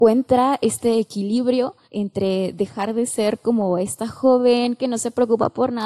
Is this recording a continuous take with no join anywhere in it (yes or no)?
no